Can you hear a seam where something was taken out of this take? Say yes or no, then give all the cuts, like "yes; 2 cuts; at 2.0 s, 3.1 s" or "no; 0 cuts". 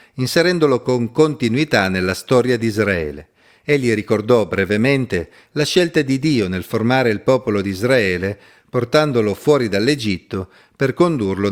no; 0 cuts